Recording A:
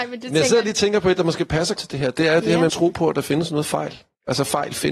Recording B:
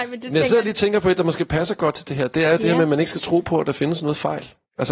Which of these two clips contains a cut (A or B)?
A